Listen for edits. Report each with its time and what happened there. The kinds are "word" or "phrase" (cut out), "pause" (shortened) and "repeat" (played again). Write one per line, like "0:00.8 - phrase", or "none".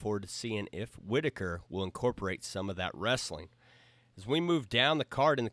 none